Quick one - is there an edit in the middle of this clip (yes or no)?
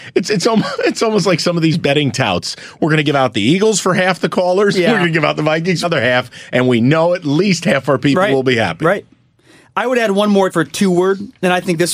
yes